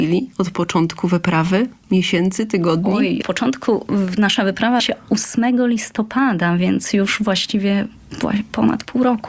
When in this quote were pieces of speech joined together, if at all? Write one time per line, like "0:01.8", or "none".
0:03.2
0:04.8